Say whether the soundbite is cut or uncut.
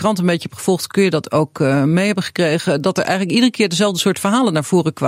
uncut